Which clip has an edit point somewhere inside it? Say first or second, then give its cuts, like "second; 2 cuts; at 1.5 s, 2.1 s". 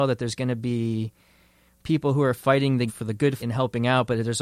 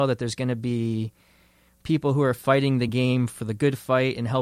first; 2 cuts; at 2.9 s, 3.4 s